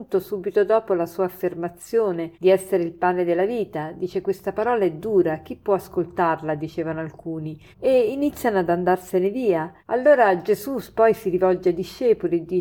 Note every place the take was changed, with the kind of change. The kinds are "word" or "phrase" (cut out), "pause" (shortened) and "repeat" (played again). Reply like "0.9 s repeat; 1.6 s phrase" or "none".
2.3 s pause; 7.7 s pause; 9.8 s pause